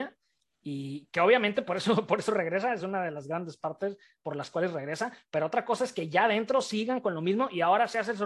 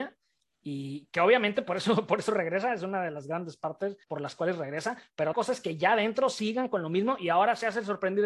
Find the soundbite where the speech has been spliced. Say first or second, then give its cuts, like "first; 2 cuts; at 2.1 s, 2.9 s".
second; 2 cuts; at 4.0 s, 5.3 s